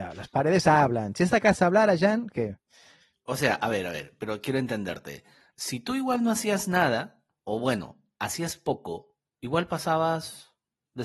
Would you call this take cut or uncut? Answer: uncut